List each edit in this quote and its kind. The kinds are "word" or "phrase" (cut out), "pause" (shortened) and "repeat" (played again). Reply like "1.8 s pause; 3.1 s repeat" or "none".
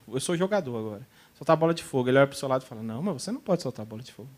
none